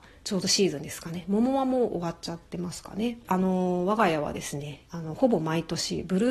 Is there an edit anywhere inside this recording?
yes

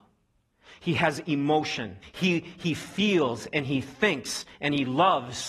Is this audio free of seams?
no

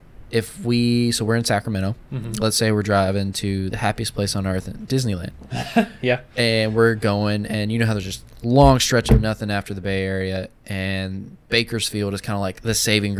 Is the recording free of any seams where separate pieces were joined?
yes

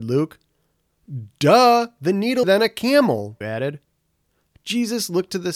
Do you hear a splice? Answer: yes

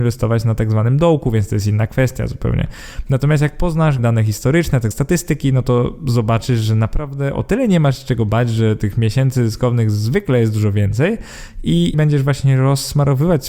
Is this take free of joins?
no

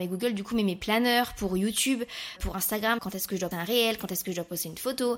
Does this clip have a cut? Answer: yes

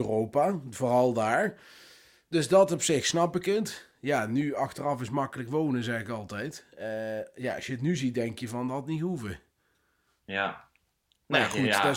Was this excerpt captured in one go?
yes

